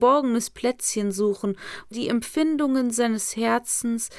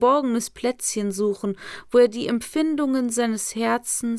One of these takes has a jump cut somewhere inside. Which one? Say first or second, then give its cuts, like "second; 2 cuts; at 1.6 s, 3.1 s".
first; 1 cut; at 1.9 s